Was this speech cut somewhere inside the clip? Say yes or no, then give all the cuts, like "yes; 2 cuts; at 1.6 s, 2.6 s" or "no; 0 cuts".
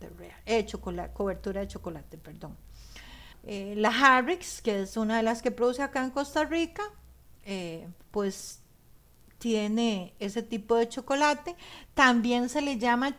yes; 2 cuts; at 3.3 s, 8.0 s